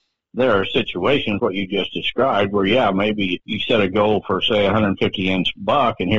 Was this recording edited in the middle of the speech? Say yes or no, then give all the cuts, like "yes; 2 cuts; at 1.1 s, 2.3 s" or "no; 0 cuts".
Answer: yes; 2 cuts; at 1.4 s, 3.4 s